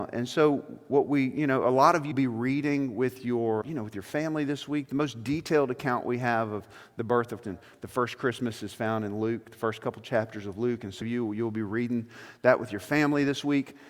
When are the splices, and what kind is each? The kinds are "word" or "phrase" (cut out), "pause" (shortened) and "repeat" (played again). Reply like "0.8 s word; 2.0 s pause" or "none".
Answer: 2.1 s word; 3.6 s word; 7.4 s word; 11.0 s word